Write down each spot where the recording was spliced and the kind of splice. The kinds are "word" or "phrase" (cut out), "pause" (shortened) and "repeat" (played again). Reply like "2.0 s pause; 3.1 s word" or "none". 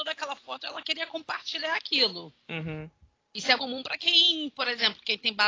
2.4 s pause; 3.6 s word